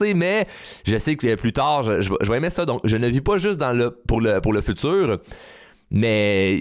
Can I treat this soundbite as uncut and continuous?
yes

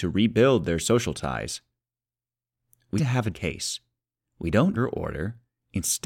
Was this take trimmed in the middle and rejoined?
yes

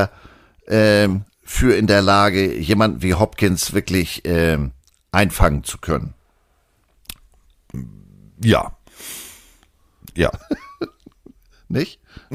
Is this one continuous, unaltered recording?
yes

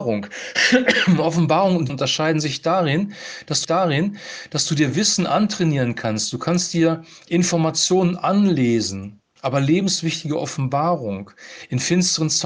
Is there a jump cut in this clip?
yes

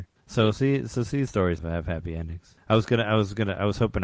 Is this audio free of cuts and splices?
no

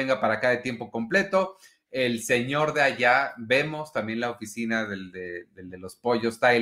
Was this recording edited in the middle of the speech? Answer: no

